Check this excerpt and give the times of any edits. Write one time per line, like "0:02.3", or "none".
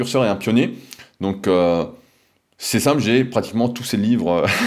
none